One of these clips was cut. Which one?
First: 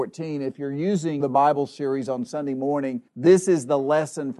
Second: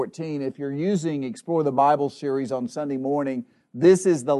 first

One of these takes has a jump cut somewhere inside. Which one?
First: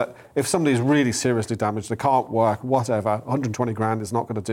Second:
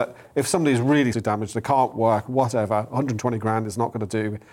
second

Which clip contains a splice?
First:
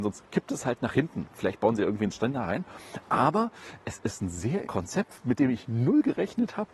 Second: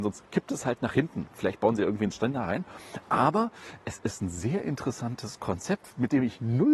first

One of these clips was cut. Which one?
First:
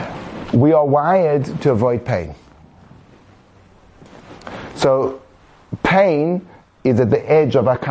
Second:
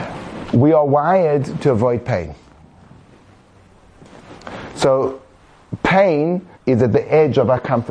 second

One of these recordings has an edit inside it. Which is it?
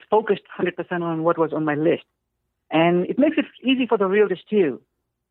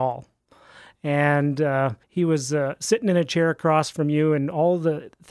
second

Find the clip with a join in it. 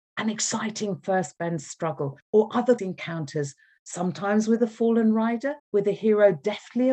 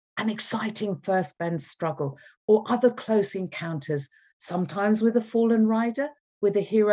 first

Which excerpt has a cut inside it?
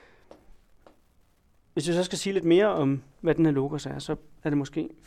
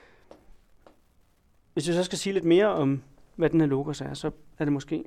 first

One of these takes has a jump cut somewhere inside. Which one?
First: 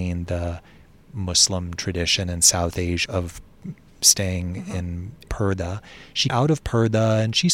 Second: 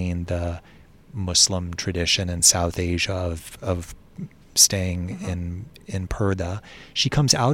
first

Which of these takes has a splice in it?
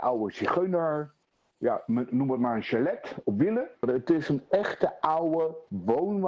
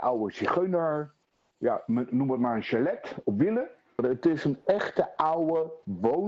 first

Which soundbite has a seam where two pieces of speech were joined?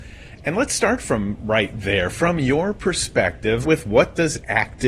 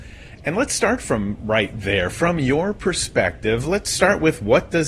first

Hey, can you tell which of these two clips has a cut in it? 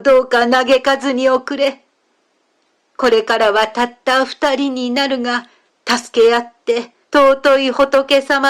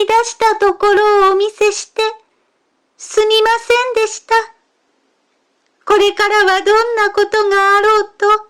first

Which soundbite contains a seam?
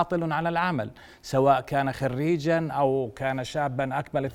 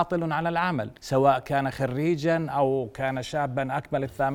second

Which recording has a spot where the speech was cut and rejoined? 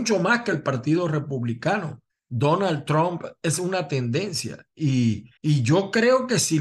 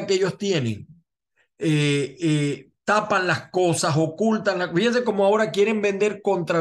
first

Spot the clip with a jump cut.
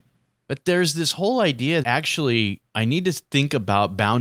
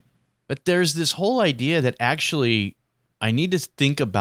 first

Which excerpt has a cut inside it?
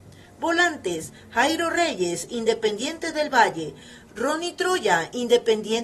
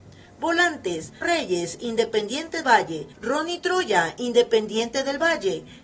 second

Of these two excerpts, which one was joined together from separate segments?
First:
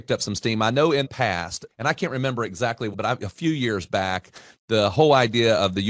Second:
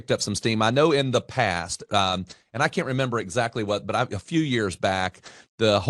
first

